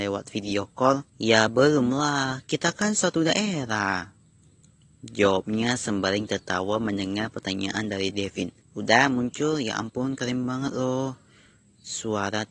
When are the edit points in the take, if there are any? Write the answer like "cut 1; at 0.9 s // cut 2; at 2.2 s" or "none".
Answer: cut 1; at 1.1 s // cut 2; at 8.6 s